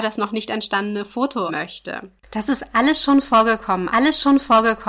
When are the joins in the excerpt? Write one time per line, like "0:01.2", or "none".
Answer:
0:01.5
0:03.9